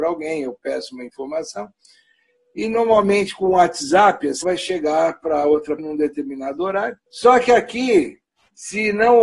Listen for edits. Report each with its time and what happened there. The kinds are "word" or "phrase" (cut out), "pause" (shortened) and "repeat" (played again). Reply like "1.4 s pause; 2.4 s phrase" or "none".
4.4 s word; 5.8 s word; 7.1 s pause